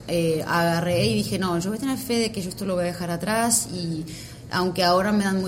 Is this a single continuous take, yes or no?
yes